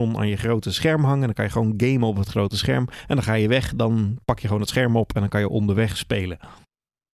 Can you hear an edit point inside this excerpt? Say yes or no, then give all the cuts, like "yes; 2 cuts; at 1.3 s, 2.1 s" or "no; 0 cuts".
no; 0 cuts